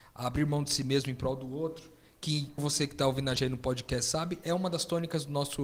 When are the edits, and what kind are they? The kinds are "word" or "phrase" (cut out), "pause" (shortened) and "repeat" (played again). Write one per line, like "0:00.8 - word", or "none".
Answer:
0:02.6 - word
0:03.4 - word

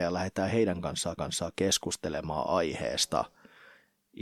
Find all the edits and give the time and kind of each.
0:01.2 - repeat

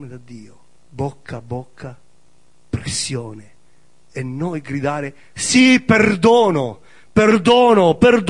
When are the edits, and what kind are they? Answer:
none

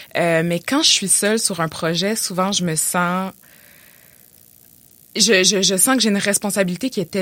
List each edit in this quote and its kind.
none

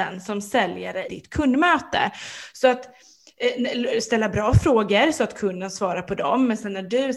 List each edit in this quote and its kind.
0:01.1 - word

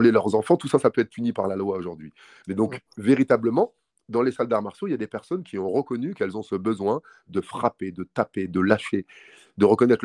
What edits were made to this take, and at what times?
none

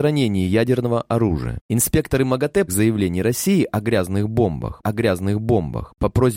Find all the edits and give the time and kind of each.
0:02.7 - phrase
0:04.8 - repeat

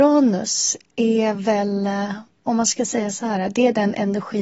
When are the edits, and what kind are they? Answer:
none

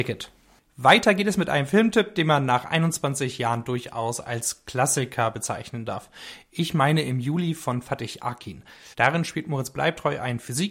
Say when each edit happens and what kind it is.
0:08.9 - pause

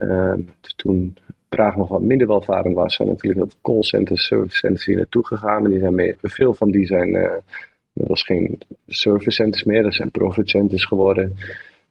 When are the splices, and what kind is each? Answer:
0:06.1 - word

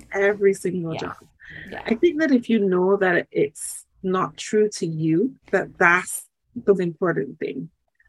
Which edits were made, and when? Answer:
0:05.4 - pause
0:06.7 - word

